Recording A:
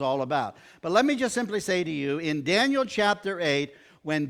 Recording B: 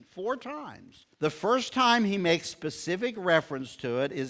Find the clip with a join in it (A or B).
B